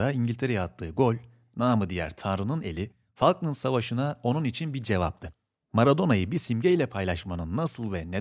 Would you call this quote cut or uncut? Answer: uncut